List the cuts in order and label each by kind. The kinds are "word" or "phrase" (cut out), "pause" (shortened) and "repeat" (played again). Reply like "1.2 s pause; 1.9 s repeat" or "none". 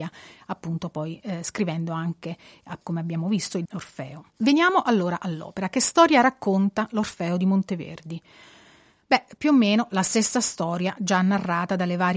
2.8 s pause; 3.7 s phrase; 4.3 s pause